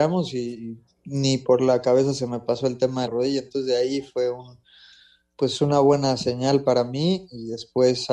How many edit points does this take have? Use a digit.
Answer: 1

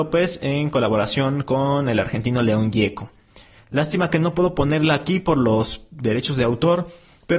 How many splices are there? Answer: 0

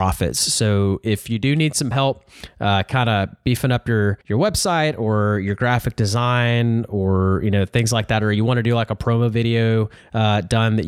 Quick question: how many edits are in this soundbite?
1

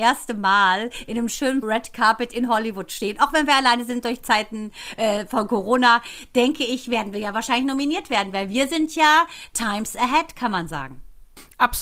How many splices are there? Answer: 1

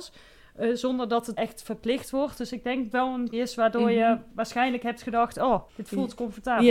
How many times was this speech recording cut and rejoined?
4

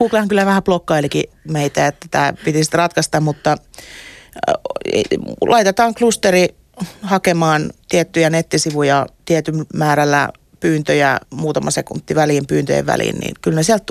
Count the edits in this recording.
2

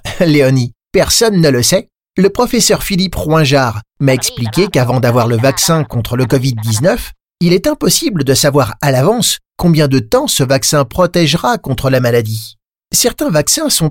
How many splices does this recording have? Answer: 0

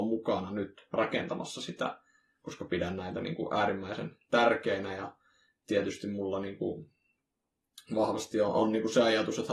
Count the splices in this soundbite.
0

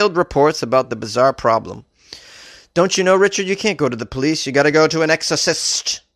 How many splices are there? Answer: 0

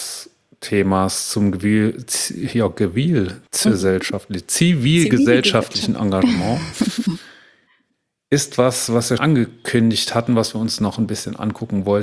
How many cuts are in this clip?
2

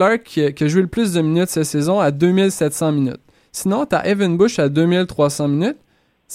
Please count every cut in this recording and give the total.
0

